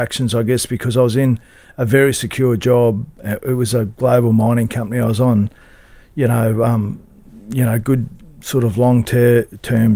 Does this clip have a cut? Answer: no; 0 cuts

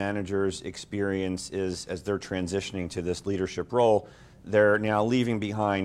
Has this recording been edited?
no; 0 cuts

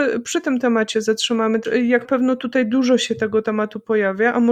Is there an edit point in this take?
yes; 2 cuts; at 0.9 s, 2.0 s

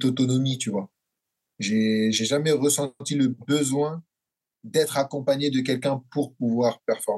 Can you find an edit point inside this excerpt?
no; 0 cuts

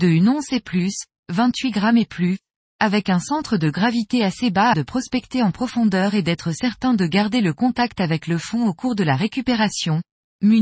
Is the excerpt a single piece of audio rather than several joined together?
no; 1 cut; at 4.7 s

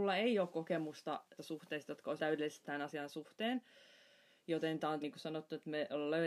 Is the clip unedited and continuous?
no; 4 cuts; at 1.4 s, 2.2 s, 2.6 s, 5.0 s

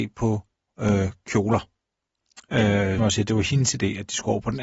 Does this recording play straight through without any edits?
no; 1 cut; at 3.0 s

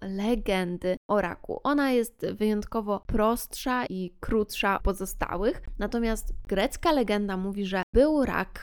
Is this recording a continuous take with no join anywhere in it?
no; 2 cuts; at 3.9 s, 4.8 s

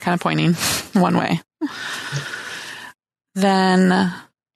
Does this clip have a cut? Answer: no; 0 cuts

